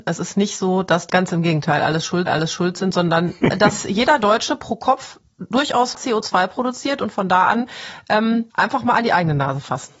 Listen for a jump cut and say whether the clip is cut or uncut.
cut